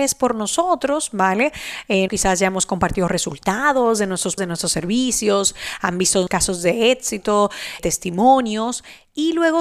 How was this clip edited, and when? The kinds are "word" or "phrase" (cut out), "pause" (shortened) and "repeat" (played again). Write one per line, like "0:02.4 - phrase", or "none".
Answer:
0:02.1 - word
0:04.4 - word
0:06.3 - word
0:07.8 - word